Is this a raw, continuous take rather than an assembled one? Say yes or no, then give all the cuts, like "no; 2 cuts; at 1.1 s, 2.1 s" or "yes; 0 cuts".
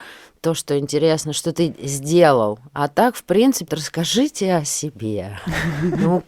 no; 1 cut; at 3.7 s